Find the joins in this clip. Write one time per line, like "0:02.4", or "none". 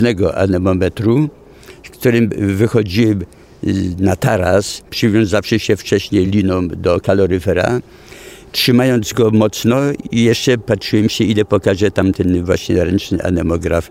none